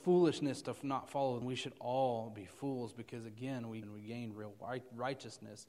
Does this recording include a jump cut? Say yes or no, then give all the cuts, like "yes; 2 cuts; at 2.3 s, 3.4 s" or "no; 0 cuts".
yes; 2 cuts; at 1.4 s, 3.8 s